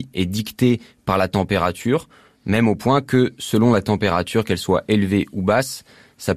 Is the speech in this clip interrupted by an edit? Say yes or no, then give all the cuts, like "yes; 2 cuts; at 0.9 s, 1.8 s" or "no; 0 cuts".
no; 0 cuts